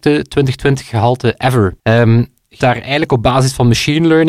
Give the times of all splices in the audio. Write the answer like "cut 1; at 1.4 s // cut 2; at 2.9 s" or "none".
cut 1; at 1.8 s // cut 2; at 2.6 s

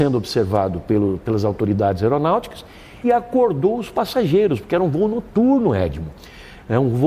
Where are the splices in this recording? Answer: cut 1; at 3.0 s

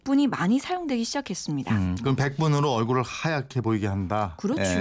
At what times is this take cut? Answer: none

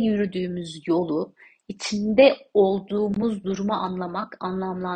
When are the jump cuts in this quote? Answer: none

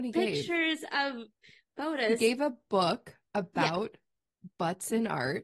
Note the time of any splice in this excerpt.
none

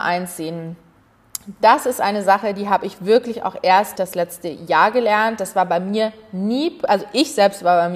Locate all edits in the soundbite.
cut 1; at 4.0 s

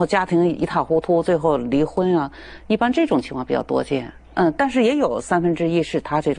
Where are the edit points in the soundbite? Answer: cut 1; at 4.2 s

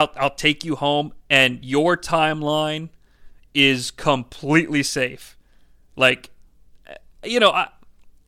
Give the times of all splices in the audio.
none

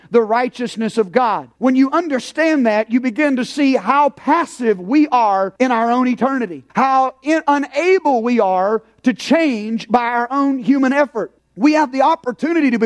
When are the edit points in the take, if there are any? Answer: cut 1; at 1.5 s // cut 2; at 5.6 s // cut 3; at 6.7 s // cut 4; at 11.4 s

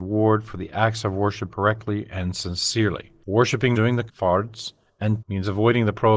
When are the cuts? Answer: cut 1; at 1.5 s // cut 2; at 3.7 s // cut 3; at 4.1 s // cut 4; at 5.2 s

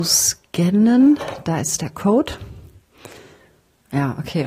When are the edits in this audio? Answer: none

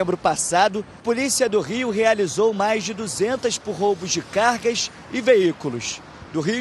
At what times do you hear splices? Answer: cut 1; at 1.0 s // cut 2; at 3.6 s

